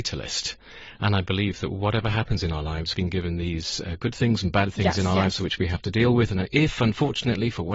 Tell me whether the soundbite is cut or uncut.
cut